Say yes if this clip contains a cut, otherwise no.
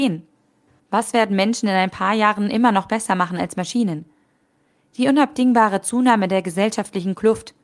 no